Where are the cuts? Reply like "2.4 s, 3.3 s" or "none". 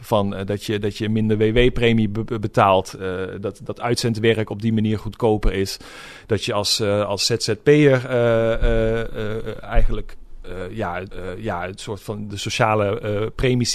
11.1 s